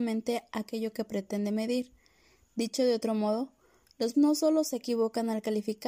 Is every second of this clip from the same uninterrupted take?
no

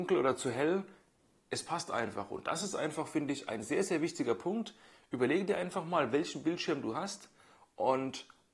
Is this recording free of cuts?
yes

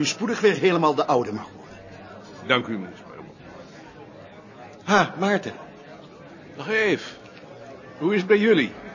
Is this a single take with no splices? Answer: yes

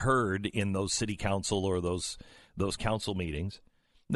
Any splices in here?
yes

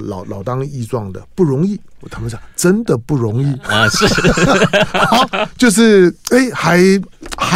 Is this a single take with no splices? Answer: yes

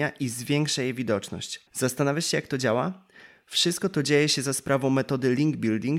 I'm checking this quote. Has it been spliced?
yes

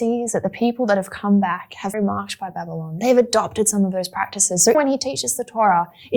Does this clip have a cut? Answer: yes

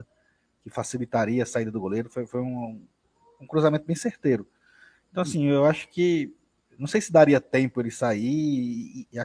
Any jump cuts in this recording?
no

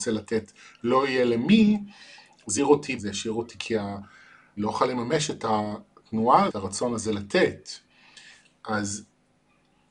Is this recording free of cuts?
no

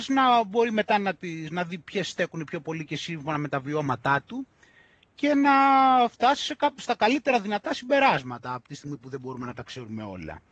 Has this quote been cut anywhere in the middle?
no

